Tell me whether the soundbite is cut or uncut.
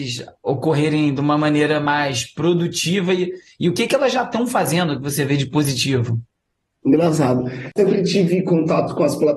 uncut